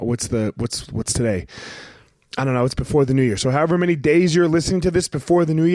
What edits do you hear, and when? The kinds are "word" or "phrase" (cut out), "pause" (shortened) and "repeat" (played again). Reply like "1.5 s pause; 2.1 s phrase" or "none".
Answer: none